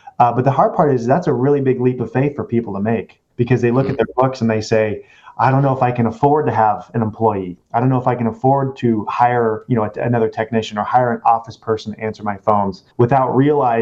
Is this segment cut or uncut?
cut